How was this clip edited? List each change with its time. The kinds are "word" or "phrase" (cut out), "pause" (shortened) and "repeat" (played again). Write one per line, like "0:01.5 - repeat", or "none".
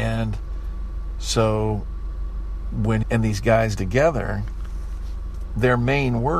0:03.0 - word
0:03.8 - word